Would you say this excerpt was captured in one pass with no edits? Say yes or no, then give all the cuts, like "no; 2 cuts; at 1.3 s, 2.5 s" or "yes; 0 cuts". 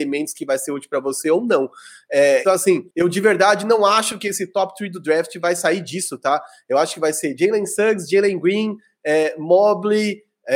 no; 2 cuts; at 2.4 s, 2.9 s